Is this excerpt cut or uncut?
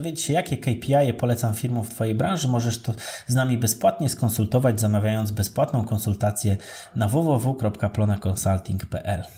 uncut